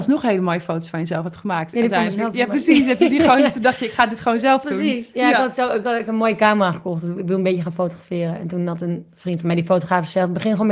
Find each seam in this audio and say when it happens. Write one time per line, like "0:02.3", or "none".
none